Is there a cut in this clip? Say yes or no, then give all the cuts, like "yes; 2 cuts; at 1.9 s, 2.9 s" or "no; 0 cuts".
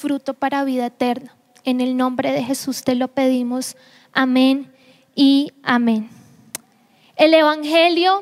no; 0 cuts